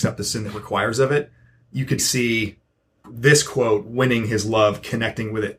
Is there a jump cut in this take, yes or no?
yes